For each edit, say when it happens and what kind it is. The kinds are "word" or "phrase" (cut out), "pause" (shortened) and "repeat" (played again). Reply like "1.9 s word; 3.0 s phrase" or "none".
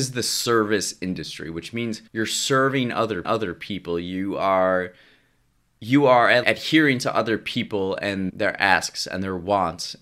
2.1 s pause; 3.2 s repeat; 5.6 s pause; 6.4 s word; 8.3 s word